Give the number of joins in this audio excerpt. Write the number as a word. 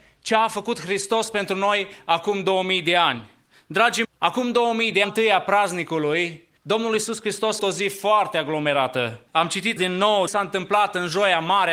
seven